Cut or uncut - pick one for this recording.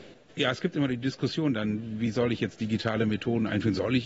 uncut